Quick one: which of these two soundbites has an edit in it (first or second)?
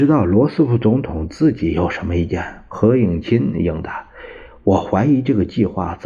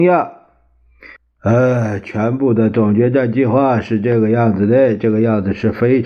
second